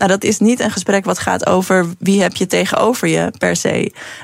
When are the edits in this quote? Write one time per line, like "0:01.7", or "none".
none

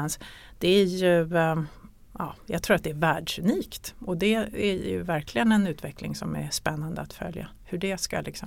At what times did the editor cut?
none

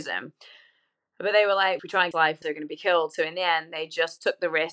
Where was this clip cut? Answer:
0:01.8
0:02.1
0:02.4

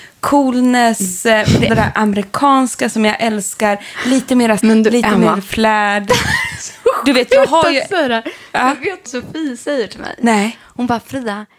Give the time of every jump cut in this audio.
0:01.7
0:04.6
0:09.1

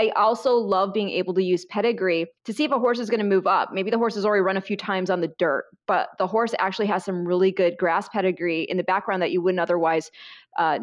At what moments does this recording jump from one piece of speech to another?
0:02.4

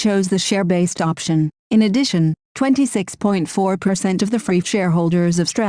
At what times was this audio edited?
0:04.6

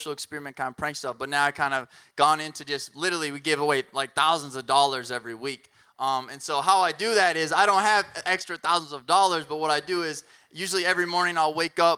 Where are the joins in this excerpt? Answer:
none

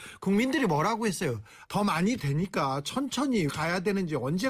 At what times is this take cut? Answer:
0:01.6
0:02.2
0:03.5

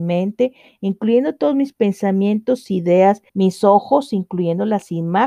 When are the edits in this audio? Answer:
0:03.3

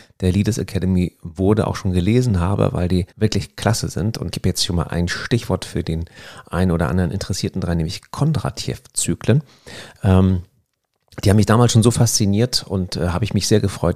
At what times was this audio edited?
0:03.1
0:04.3

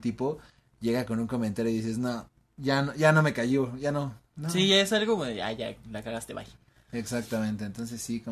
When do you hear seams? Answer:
none

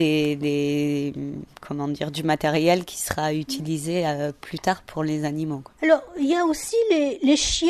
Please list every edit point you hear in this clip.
none

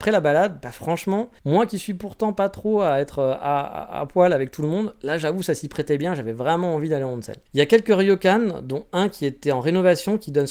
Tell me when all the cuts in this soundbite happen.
0:01.4
0:07.5

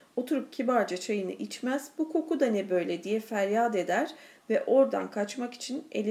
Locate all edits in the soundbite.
none

